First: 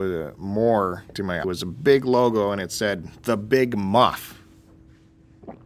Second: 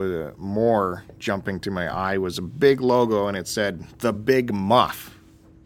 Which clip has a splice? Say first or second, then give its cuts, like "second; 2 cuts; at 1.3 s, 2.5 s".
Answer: first; 2 cuts; at 1.1 s, 1.4 s